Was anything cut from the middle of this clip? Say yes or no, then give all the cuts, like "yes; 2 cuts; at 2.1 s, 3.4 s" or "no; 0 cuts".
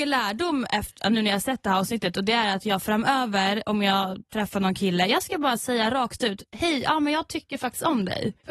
no; 0 cuts